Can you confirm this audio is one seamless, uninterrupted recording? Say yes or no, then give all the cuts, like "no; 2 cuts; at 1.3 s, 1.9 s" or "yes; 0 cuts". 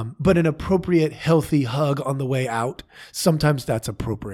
yes; 0 cuts